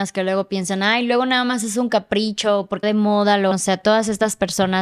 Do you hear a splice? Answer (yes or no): yes